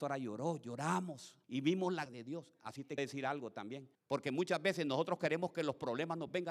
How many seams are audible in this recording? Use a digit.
4